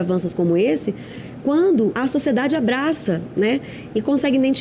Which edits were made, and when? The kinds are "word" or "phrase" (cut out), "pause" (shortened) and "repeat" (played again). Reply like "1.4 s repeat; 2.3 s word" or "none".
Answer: 2.0 s word

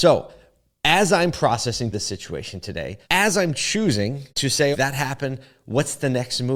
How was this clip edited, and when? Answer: 1.9 s word; 3.0 s pause; 4.3 s pause; 4.7 s word

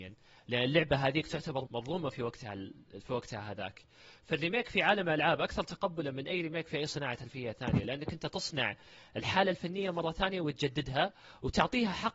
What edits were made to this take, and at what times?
1.7 s word

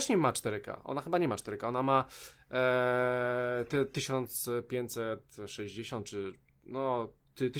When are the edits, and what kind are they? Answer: none

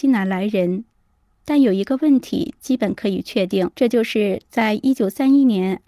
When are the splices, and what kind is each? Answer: 3.7 s pause

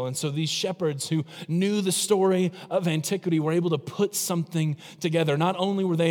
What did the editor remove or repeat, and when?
none

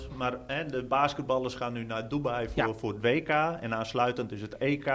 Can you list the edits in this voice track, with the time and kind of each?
none

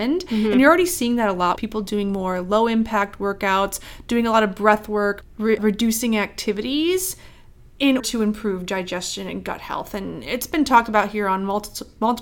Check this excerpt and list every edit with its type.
1.6 s word; 5.2 s phrase; 5.6 s word; 8.0 s word

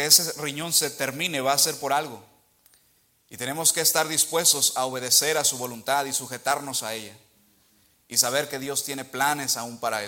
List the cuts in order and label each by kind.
none

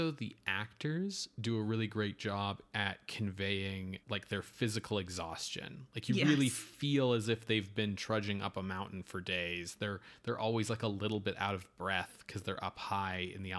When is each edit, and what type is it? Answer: 4.0 s pause

